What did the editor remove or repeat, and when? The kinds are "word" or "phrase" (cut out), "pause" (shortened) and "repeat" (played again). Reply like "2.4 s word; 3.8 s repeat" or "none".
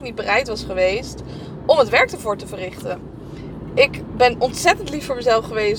none